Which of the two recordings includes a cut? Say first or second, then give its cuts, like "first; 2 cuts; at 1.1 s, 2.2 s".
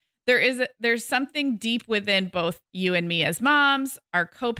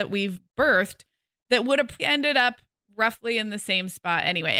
second; 1 cut; at 2.0 s